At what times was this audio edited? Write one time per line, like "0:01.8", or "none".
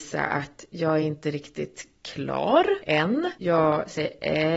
none